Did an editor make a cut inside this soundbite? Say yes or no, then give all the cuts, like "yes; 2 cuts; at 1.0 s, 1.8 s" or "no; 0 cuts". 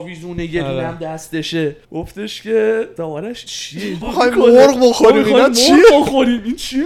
yes; 4 cuts; at 1.8 s, 3.0 s, 3.5 s, 4.0 s